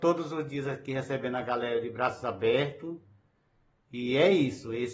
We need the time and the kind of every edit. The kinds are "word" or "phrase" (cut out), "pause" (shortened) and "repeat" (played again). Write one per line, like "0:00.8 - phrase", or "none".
none